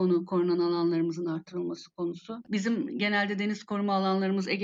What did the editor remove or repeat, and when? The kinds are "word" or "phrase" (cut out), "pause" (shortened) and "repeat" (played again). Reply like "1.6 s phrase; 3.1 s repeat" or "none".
none